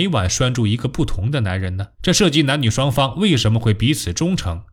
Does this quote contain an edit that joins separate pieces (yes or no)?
yes